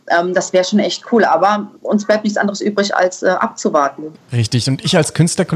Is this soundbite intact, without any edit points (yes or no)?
no